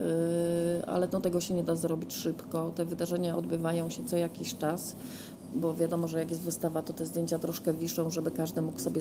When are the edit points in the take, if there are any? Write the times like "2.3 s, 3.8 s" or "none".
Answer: none

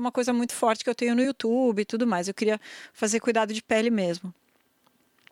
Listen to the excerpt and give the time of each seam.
none

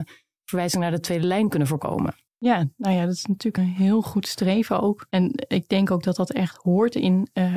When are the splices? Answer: 3.6 s

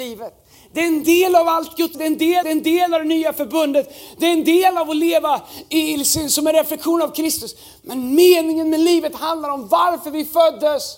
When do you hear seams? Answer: 1.9 s, 2.4 s

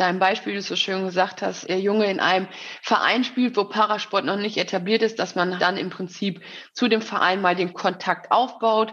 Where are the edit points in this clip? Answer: 1.6 s, 5.6 s

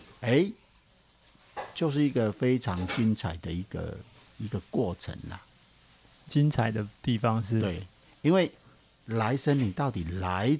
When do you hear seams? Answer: none

